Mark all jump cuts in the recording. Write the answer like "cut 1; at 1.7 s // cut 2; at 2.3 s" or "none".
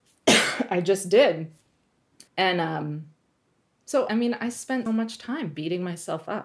cut 1; at 2.3 s // cut 2; at 4.1 s // cut 3; at 4.9 s